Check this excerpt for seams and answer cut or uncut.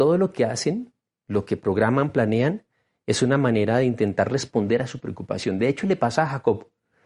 uncut